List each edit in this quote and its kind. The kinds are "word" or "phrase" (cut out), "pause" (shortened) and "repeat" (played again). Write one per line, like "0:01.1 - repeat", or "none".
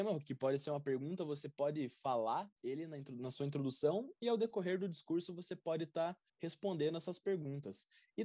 0:02.5 - pause
0:06.3 - pause

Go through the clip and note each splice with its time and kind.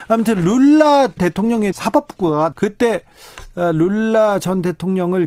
0:01.2 - word
0:01.7 - word
0:02.5 - word

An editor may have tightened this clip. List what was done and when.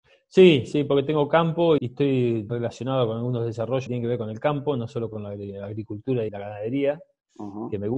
0:01.8 - word
0:02.5 - word
0:03.9 - word
0:06.3 - word

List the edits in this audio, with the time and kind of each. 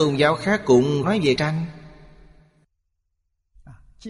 0:01.0 - word
0:01.4 - word

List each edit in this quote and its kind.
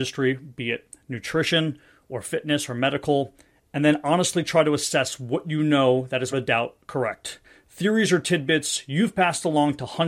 0:06.3 - word

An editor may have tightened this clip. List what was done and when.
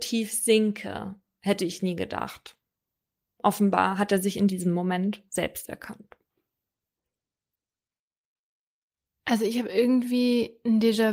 none

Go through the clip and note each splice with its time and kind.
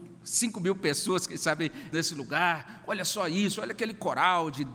0:01.9 - word

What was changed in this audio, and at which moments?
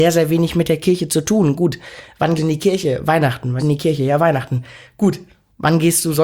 0:02.4 - word
0:03.6 - phrase

